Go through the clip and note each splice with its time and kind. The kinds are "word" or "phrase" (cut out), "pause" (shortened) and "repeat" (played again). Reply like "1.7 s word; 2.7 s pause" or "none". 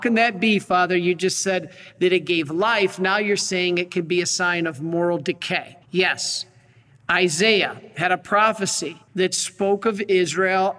5.8 s pause; 9.1 s pause